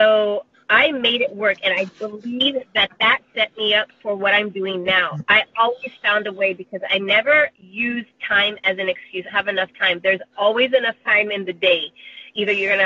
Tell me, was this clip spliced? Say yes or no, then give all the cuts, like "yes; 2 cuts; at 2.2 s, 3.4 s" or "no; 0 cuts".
yes; 1 cut; at 9.3 s